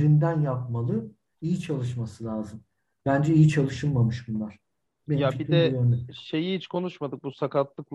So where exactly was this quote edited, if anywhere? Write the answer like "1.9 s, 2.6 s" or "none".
1.3 s